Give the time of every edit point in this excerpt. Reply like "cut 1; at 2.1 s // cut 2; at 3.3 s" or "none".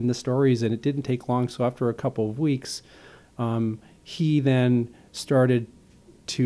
none

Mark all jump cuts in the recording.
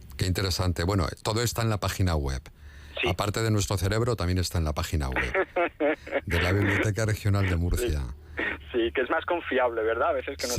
none

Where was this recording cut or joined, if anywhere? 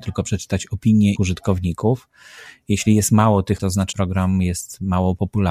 cut 1; at 1.2 s // cut 2; at 3.6 s // cut 3; at 3.9 s

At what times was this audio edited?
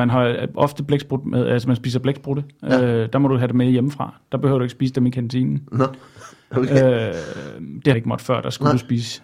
cut 1; at 7.9 s

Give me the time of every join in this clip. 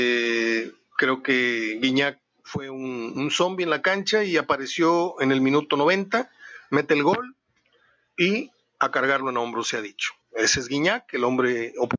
cut 1; at 10.2 s

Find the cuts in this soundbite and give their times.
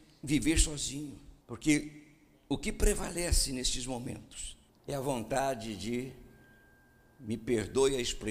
cut 1; at 1.4 s // cut 2; at 4.7 s

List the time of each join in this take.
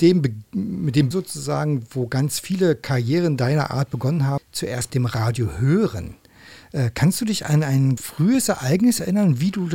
cut 1; at 1.1 s // cut 2; at 4.4 s // cut 3; at 4.9 s // cut 4; at 8.0 s

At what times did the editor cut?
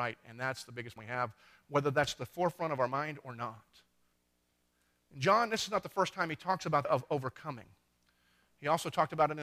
cut 1; at 1.0 s // cut 2; at 4.1 s // cut 3; at 6.8 s

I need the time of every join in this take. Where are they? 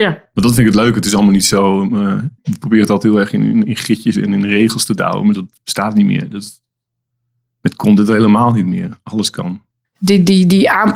cut 1; at 2.4 s // cut 2; at 5.3 s

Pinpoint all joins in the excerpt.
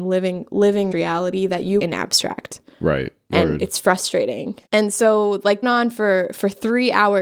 cut 1; at 0.9 s // cut 2; at 1.8 s // cut 3; at 4.7 s // cut 4; at 5.6 s

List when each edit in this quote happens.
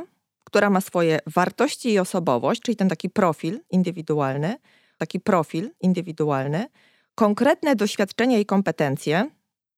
cut 1; at 5.0 s

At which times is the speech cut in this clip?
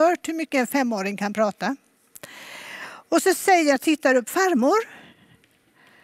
cut 1; at 3.8 s

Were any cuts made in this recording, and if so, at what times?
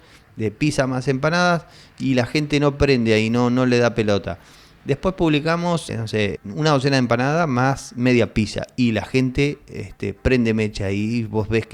cut 1; at 5.9 s // cut 2; at 6.4 s

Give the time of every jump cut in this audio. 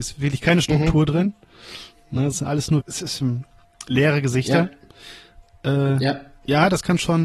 cut 1; at 2.3 s // cut 2; at 2.8 s

